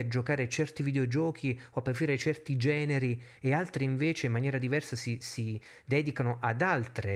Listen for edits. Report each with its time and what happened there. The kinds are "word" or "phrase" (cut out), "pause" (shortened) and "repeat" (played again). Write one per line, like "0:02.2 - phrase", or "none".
none